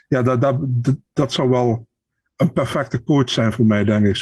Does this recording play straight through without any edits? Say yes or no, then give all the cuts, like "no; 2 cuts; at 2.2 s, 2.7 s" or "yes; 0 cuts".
yes; 0 cuts